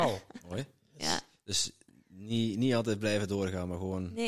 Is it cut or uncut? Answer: uncut